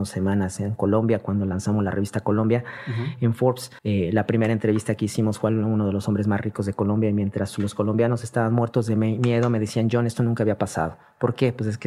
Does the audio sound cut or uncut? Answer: cut